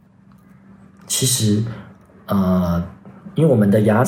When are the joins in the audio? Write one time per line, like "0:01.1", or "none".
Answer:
none